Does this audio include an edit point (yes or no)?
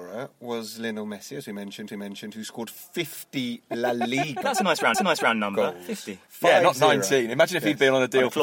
yes